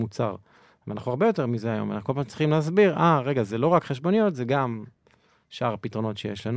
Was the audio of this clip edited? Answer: no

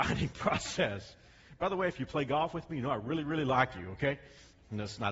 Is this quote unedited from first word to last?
yes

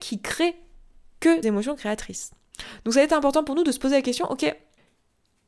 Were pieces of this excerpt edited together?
yes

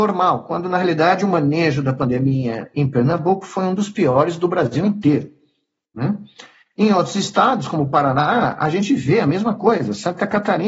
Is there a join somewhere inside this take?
no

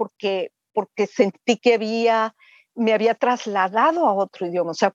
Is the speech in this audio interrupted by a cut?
no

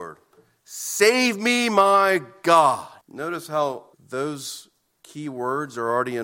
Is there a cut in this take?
yes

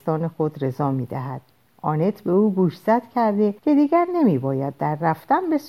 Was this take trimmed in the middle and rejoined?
yes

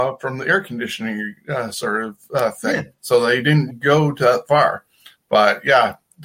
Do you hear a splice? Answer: yes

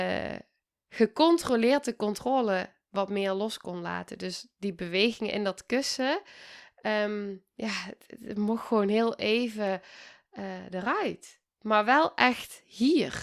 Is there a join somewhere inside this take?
yes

